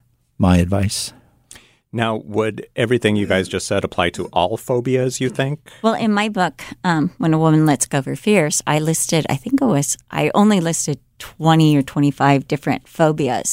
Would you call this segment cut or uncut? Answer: uncut